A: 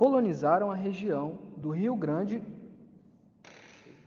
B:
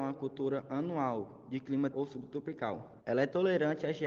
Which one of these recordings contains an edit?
B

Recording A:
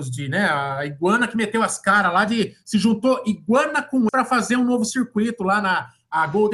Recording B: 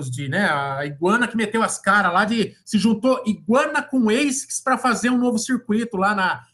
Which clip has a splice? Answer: A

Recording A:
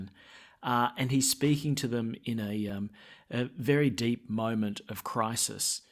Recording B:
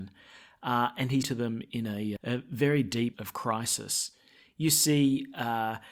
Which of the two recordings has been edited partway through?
B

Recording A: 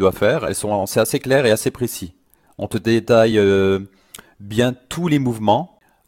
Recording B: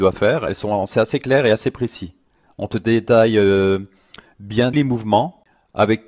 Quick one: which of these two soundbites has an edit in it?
B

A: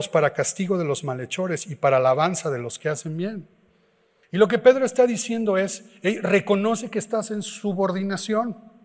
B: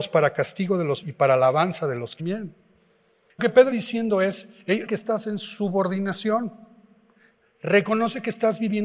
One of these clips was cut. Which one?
B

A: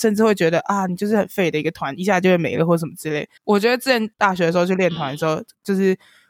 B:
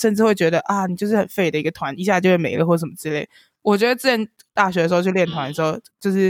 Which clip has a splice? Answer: A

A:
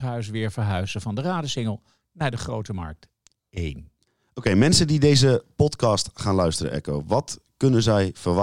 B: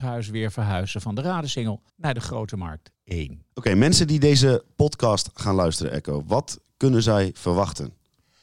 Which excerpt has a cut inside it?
B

